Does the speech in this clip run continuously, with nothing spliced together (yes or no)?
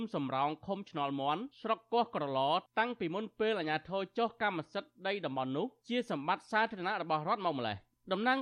no